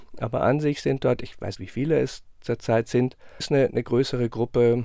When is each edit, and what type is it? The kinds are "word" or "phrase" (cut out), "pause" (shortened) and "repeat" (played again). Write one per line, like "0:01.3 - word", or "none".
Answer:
0:01.6 - word
0:03.4 - word